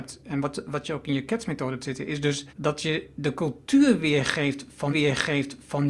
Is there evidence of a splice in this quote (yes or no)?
yes